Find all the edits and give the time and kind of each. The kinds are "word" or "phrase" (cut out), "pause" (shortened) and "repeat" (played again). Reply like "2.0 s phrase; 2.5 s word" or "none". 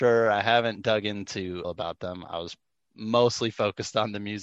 1.6 s phrase